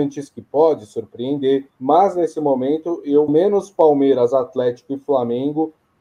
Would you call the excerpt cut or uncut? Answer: cut